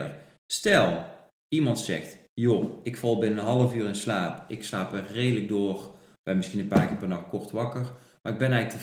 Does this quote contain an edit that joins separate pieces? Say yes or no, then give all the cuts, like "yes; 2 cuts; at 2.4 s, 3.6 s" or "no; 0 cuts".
no; 0 cuts